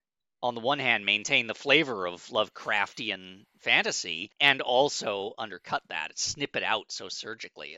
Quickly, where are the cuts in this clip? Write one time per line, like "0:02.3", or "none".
0:04.3